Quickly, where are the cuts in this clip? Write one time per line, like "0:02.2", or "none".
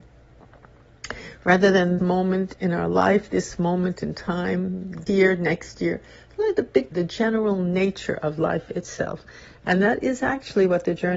0:02.0
0:05.1
0:06.9